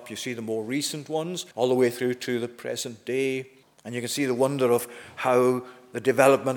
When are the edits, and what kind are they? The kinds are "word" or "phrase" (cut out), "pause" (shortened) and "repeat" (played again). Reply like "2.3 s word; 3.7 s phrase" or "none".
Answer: 1.5 s pause; 3.6 s pause